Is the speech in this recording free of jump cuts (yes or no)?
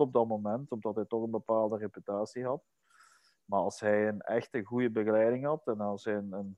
yes